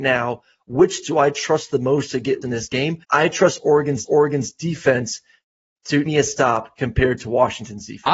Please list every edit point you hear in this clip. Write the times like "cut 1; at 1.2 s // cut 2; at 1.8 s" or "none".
cut 1; at 1.0 s // cut 2; at 2.4 s // cut 3; at 3.0 s // cut 4; at 4.1 s // cut 5; at 6.1 s